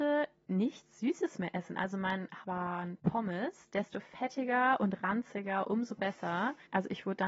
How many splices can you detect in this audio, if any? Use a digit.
1